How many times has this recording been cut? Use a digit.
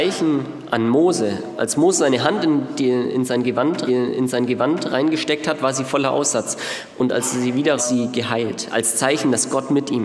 2